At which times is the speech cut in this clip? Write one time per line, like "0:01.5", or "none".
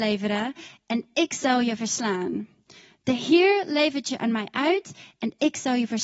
none